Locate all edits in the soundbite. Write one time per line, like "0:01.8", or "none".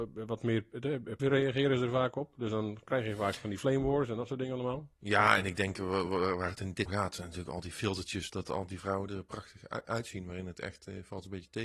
0:01.2
0:06.9
0:08.3